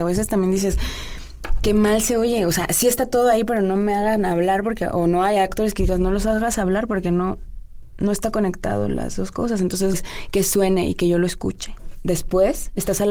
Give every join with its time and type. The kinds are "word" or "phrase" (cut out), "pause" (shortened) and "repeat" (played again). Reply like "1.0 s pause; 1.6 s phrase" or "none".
9.9 s word